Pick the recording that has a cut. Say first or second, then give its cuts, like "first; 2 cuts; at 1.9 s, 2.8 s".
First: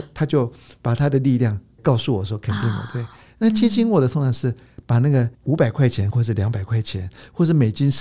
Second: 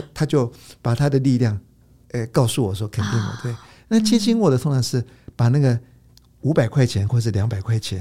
first; 2 cuts; at 1.8 s, 5.3 s